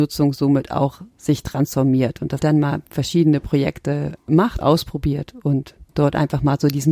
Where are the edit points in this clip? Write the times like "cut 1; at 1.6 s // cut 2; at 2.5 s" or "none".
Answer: cut 1; at 2.4 s // cut 2; at 4.6 s // cut 3; at 5.9 s